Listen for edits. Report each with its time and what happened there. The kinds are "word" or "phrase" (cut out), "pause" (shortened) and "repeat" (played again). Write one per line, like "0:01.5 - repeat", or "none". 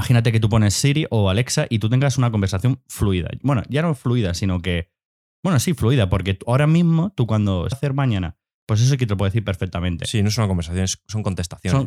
0:07.7 - phrase